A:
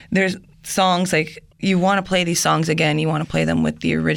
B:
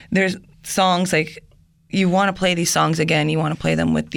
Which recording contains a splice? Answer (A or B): A